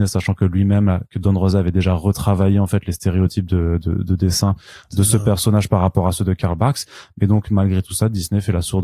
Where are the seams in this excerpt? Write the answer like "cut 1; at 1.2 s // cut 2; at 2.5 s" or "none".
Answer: none

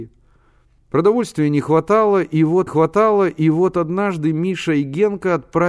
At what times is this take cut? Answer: cut 1; at 2.7 s

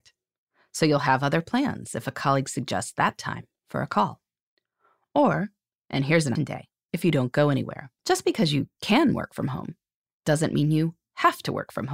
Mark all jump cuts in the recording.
cut 1; at 6.4 s // cut 2; at 6.9 s // cut 3; at 8.0 s

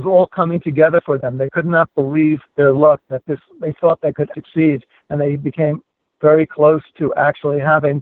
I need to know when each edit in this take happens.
cut 1; at 2.5 s // cut 2; at 4.3 s

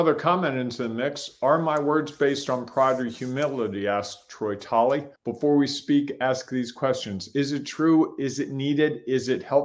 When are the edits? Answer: cut 1; at 5.2 s

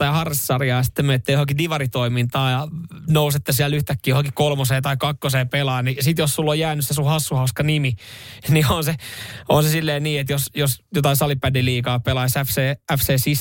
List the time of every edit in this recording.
none

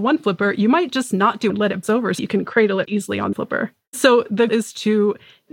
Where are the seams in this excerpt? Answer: cut 1; at 1.5 s // cut 2; at 1.8 s // cut 3; at 2.2 s // cut 4; at 2.9 s // cut 5; at 3.3 s // cut 6; at 4.5 s

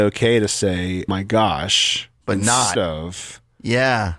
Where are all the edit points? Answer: cut 1; at 1.1 s // cut 2; at 2.2 s // cut 3; at 2.8 s

